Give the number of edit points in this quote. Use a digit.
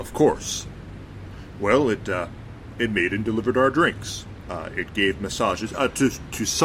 0